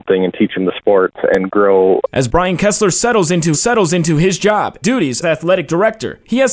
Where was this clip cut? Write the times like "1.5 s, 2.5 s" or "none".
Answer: 3.5 s, 4.8 s, 5.2 s